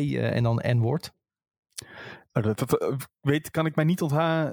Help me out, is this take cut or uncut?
cut